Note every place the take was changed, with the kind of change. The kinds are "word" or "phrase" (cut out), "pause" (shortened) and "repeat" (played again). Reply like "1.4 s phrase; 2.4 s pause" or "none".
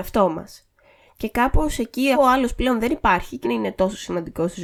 2.1 s word; 3.4 s word